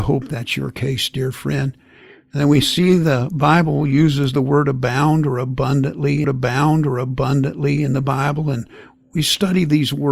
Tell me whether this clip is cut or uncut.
cut